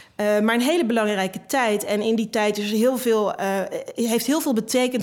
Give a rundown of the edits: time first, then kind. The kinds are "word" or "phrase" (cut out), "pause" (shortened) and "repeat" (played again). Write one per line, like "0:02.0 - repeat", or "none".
none

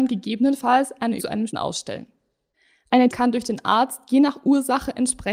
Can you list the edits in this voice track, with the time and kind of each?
0:01.2 - word
0:01.5 - word
0:03.1 - word

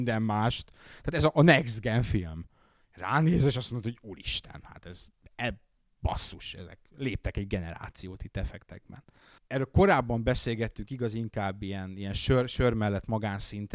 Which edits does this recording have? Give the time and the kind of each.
none

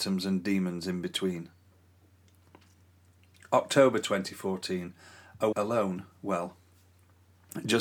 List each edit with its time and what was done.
0:05.5 - word

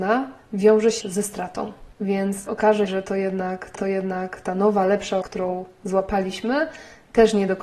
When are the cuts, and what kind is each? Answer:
0:01.0 - word
0:02.5 - word
0:02.9 - word
0:03.8 - repeat
0:05.2 - word

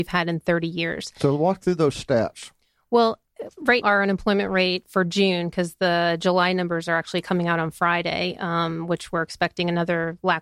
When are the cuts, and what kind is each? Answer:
0:03.8 - word

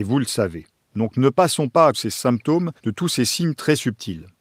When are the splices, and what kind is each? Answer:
0:01.9 - phrase
0:02.8 - pause

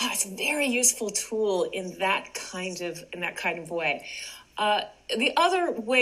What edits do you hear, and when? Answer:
none

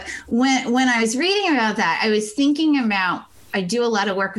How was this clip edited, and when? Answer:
0:03.4 - pause

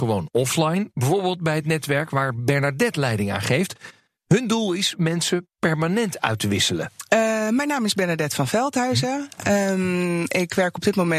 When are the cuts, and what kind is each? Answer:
none

